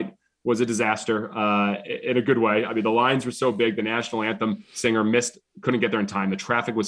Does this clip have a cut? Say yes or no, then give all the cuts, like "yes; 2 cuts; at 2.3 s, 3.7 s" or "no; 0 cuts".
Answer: no; 0 cuts